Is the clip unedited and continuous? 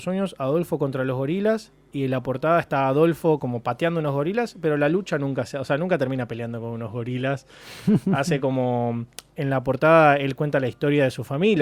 yes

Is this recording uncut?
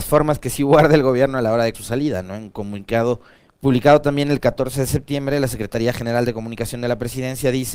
no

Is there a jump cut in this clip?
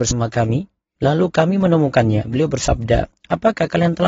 no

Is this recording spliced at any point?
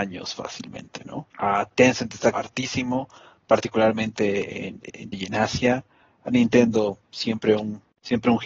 yes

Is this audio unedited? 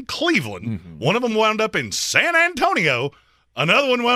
yes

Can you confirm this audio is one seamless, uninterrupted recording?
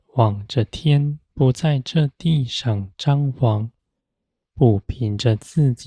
no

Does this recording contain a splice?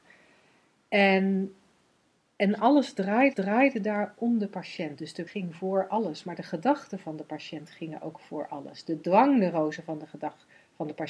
yes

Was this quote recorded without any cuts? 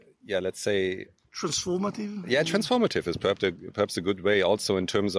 no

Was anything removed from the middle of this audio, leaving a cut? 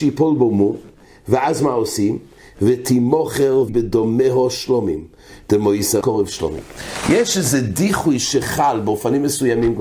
yes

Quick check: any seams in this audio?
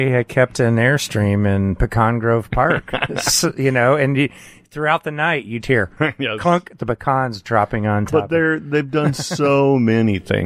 yes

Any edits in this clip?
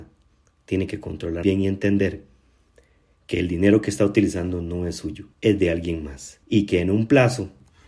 yes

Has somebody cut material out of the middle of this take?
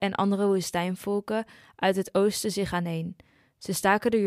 no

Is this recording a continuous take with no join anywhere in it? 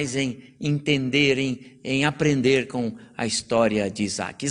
yes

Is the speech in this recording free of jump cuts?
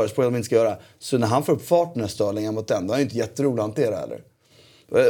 yes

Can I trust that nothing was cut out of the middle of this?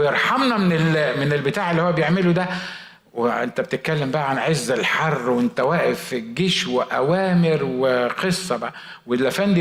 yes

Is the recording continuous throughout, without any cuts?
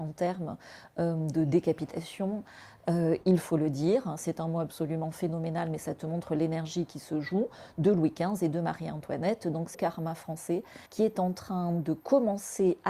no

